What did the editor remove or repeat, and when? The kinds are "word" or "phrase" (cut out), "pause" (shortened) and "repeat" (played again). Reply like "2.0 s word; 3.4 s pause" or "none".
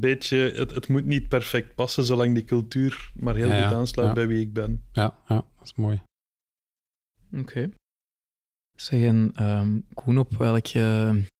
none